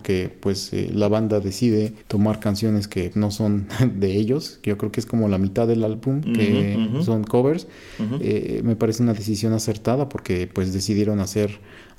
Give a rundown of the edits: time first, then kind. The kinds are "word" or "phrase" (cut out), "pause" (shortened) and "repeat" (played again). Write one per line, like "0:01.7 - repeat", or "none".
0:02.0 - pause
0:03.1 - word